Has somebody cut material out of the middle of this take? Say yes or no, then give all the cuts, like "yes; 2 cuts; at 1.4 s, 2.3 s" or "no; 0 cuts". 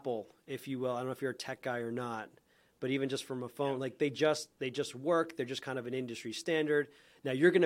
no; 0 cuts